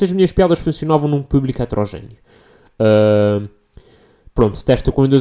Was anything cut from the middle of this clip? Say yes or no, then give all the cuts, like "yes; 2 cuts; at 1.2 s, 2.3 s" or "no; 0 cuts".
no; 0 cuts